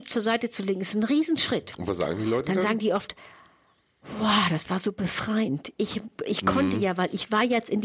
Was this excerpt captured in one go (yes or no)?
yes